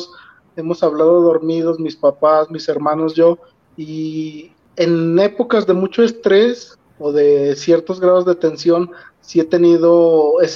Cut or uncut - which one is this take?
uncut